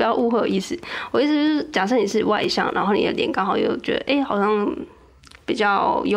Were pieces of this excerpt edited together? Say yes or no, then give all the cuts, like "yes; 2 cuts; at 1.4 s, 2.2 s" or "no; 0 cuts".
no; 0 cuts